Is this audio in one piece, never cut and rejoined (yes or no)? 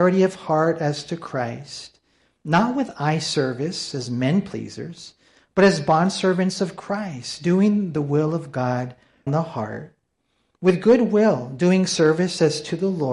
no